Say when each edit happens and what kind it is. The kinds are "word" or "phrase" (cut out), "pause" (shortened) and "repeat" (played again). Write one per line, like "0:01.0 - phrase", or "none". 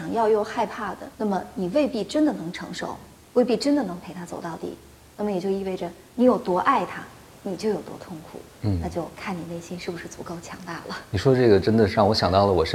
0:01.1 - pause